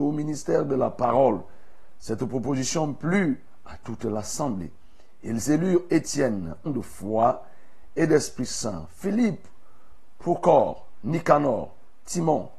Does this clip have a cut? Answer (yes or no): yes